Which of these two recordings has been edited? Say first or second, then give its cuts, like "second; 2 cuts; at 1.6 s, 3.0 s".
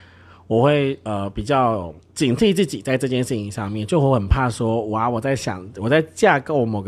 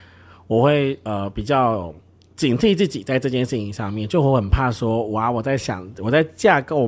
first; 1 cut; at 2.0 s